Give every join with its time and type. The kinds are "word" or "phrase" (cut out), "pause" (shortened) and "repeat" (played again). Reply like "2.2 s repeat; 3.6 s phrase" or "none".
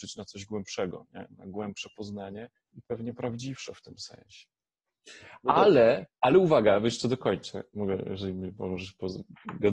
2.6 s pause